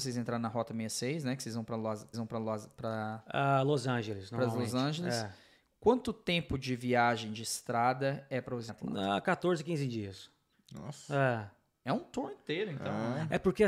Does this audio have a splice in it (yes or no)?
yes